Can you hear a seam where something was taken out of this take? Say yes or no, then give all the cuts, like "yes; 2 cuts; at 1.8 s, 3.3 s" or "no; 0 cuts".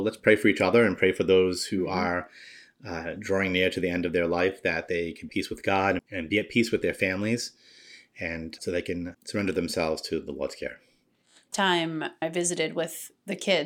yes; 6 cuts; at 5.3 s, 6.0 s, 8.6 s, 9.1 s, 11.5 s, 12.2 s